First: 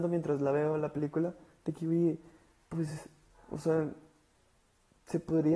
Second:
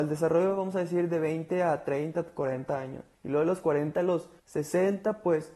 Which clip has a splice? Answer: second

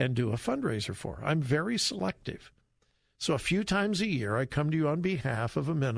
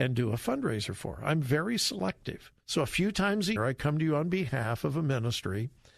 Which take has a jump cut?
second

